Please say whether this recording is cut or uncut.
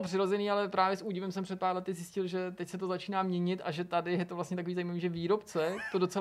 uncut